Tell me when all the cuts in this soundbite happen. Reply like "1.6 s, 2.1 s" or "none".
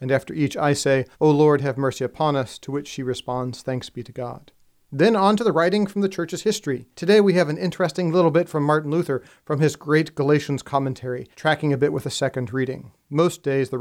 1.1 s, 6.9 s, 11.3 s